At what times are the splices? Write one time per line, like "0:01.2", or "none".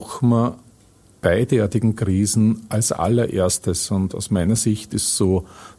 none